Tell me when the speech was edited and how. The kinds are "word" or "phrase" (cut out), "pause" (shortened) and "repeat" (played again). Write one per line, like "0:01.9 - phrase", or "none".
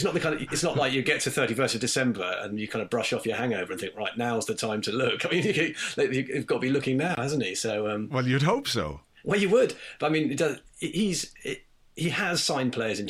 none